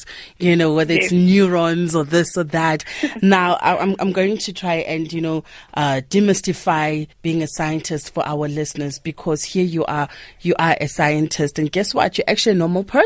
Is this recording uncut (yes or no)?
no